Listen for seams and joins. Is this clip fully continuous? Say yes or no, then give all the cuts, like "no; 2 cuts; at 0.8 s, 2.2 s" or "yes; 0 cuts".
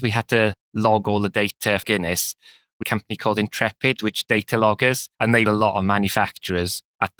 no; 5 cuts; at 1.8 s, 2.8 s, 4.3 s, 5.1 s, 5.5 s